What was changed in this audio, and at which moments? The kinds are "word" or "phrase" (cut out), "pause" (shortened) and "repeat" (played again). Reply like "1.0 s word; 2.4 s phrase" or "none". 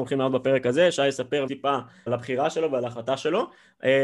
1.5 s word; 2.1 s word